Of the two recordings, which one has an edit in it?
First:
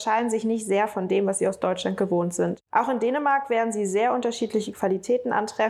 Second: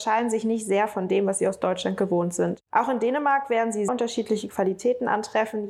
second; 1 cut; at 3.9 s

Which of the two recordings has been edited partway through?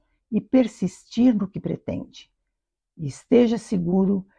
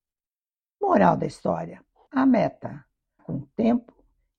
second; 2 cuts; at 2.1 s, 3.2 s

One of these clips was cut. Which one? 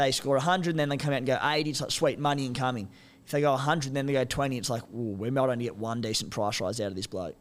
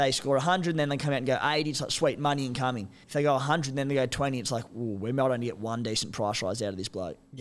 second; 1 cut; at 3.0 s

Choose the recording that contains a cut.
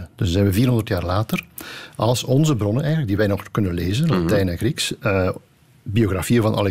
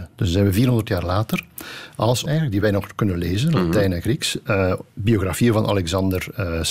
second; 2 cuts; at 2.3 s, 4.9 s

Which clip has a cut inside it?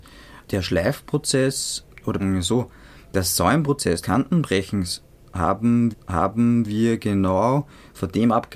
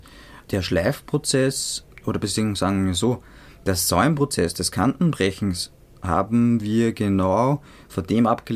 first; 3 cuts; at 2.2 s, 4.0 s, 5.9 s

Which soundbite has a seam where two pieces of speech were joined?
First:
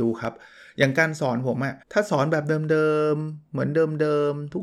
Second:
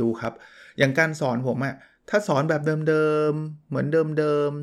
first; 1 cut; at 1.8 s

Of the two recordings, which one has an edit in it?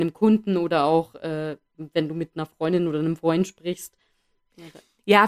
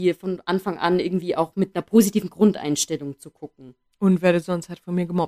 second; 1 cut; at 1.7 s

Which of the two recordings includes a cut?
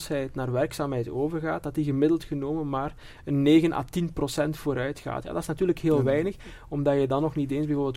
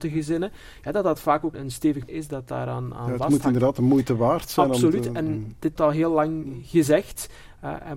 second; 3 cuts; at 1.5 s, 2.1 s, 5.8 s

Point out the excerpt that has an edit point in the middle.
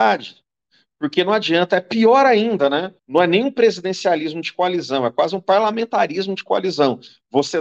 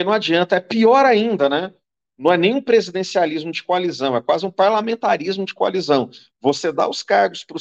first; 1 cut; at 3.0 s

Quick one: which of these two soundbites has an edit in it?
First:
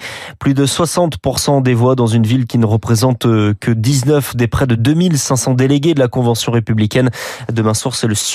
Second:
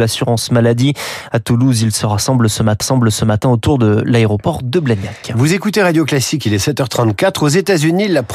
second; 1 cut; at 2.8 s

